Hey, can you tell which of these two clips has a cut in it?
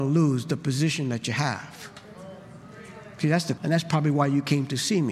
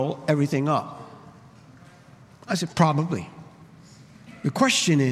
first; 1 cut; at 3.6 s

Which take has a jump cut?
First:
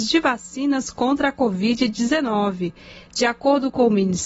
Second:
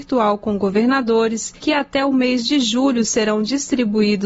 second; 1 cut; at 1.6 s

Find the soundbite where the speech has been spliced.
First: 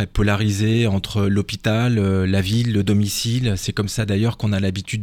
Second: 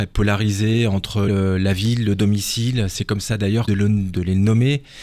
second; 2 cuts; at 1.3 s, 3.7 s

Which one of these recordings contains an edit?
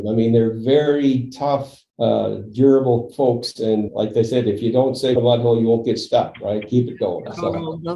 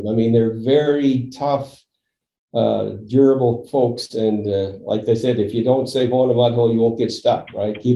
first; 3 cuts; at 1.9 s, 3.9 s, 5.2 s

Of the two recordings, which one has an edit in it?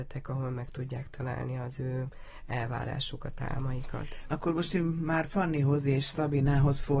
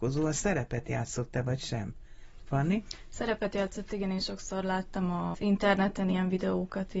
second; 1 cut; at 5.3 s

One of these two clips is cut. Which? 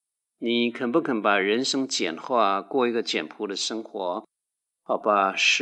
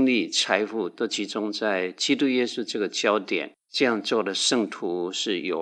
second; 1 cut; at 3.6 s

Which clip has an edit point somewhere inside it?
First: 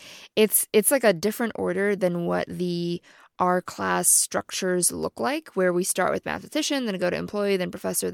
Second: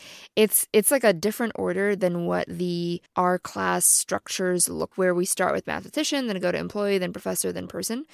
second; 2 cuts; at 3.1 s, 4.9 s

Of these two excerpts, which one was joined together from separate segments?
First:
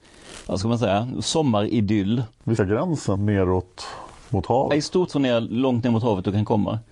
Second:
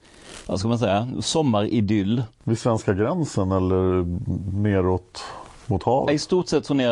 first; 3 cuts; at 2.6 s, 3.2 s, 5.1 s

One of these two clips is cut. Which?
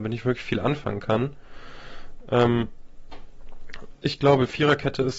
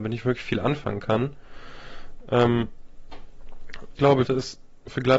second; 2 cuts; at 4.0 s, 4.3 s

